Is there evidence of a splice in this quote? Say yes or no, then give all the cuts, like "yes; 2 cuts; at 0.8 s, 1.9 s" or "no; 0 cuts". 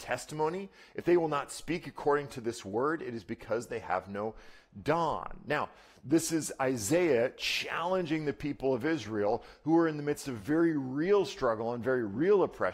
no; 0 cuts